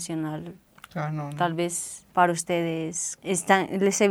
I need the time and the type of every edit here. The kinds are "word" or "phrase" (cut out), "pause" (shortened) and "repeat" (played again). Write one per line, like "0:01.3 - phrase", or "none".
0:02.1 - pause
0:03.2 - word